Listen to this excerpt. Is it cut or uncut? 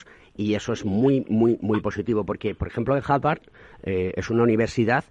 uncut